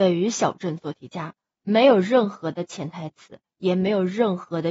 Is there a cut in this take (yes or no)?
no